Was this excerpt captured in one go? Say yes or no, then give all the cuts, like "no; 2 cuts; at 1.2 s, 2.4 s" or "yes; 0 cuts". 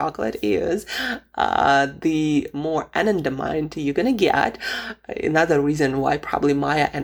yes; 0 cuts